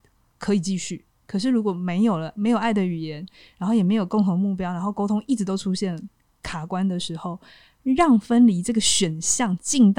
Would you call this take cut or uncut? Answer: uncut